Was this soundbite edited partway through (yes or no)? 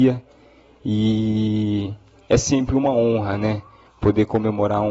no